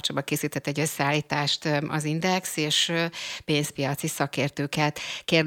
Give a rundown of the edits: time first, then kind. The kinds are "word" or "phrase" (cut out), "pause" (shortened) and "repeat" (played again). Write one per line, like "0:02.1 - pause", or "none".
none

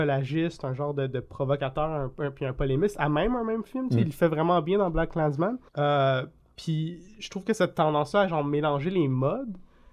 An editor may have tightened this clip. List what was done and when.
0:05.7 - pause

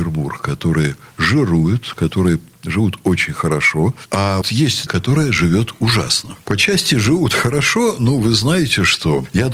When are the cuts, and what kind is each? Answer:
0:04.4 - word
0:04.9 - phrase

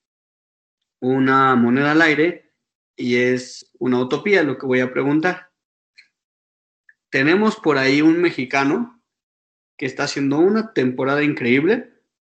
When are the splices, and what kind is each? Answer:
none

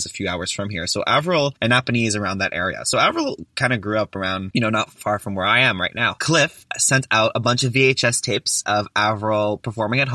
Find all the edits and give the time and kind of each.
none

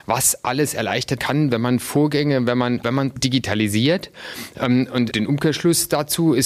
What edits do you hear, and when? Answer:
0:01.2 - word
0:02.8 - word
0:03.2 - word
0:05.1 - word

